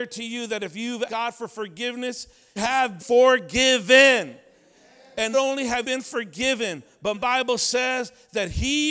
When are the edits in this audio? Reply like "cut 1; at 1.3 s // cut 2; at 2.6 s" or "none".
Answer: cut 1; at 1.1 s // cut 2; at 2.6 s // cut 3; at 3.0 s // cut 4; at 5.3 s // cut 5; at 5.8 s // cut 6; at 7.1 s